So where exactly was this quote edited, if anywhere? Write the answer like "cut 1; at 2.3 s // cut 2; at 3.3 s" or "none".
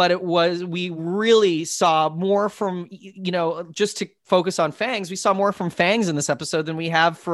none